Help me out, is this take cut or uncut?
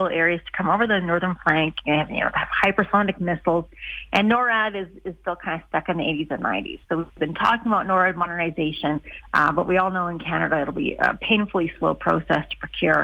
cut